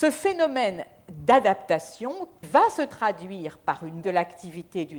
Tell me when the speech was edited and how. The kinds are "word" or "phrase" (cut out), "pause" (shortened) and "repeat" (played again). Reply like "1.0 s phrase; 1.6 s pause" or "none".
2.4 s word; 4.0 s word